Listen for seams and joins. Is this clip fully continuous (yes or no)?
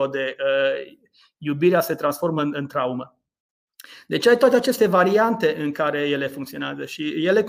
yes